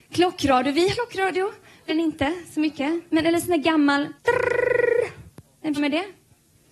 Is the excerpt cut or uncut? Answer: cut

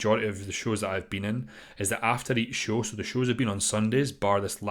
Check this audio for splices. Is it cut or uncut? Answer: uncut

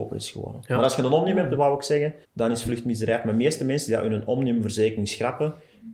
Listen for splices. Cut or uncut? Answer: cut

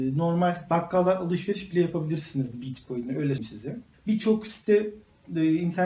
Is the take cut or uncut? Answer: cut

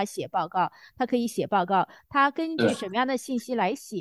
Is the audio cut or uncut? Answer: uncut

